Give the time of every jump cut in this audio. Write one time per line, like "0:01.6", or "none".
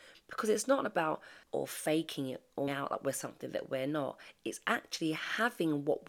0:01.5
0:02.7